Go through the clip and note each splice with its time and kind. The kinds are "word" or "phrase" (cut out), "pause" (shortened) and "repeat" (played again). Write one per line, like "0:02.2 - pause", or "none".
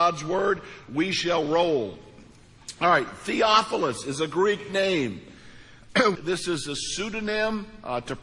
0:06.2 - phrase